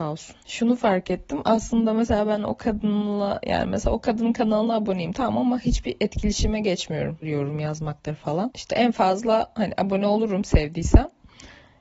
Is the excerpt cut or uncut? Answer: uncut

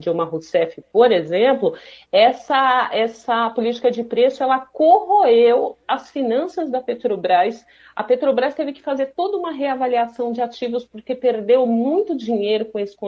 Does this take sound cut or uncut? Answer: uncut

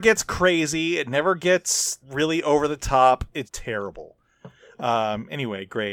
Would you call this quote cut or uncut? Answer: cut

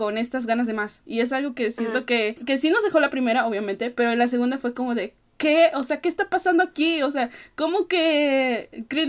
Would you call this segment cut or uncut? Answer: uncut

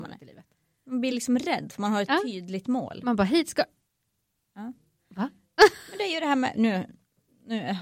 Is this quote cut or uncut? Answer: uncut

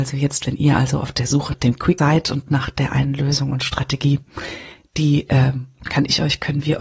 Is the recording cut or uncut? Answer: cut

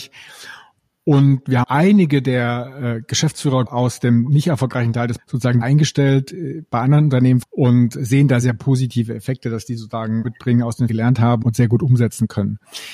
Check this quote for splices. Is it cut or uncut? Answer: cut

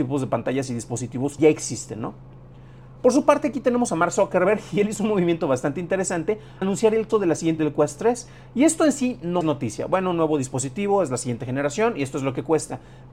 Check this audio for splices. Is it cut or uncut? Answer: cut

